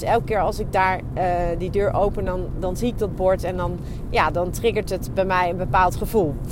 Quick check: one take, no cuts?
yes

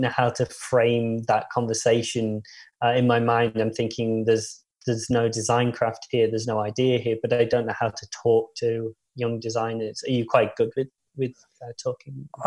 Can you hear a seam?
no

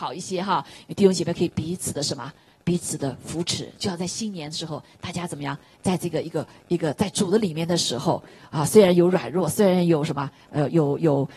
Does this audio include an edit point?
no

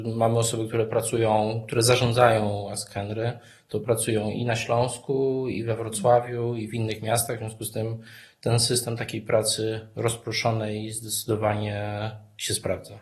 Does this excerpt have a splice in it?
no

